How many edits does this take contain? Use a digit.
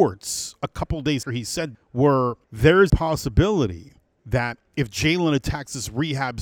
5